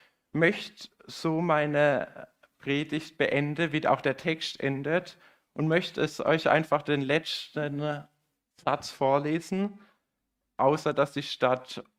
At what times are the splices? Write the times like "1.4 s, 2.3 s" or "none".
none